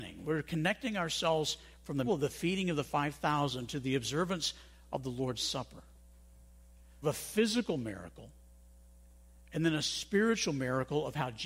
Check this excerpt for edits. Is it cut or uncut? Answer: cut